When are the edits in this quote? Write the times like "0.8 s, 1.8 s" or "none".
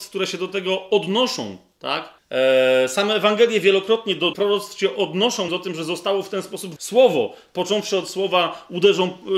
2.2 s, 4.3 s, 5.5 s, 6.8 s